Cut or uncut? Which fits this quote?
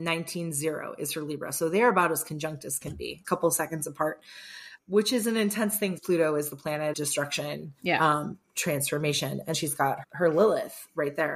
cut